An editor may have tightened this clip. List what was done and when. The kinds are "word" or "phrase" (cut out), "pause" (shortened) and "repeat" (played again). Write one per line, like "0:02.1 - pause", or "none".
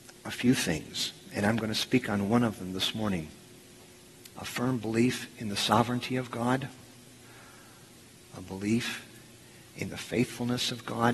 0:04.3 - pause